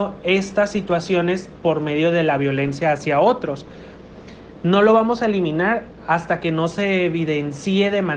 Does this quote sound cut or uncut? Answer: uncut